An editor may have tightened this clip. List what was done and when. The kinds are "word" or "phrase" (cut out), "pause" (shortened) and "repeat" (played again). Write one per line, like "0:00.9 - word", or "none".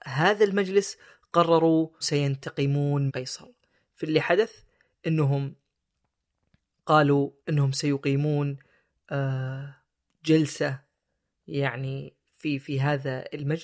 0:02.0 - word
0:03.1 - word
0:07.4 - pause